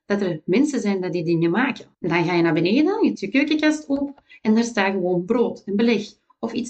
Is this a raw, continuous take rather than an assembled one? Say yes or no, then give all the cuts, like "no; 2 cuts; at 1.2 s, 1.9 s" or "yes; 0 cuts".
no; 2 cuts; at 1.9 s, 3.1 s